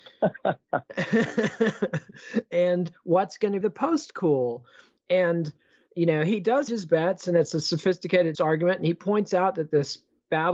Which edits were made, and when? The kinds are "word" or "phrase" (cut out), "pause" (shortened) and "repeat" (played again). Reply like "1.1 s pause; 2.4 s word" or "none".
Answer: 3.6 s word; 6.7 s word; 8.3 s word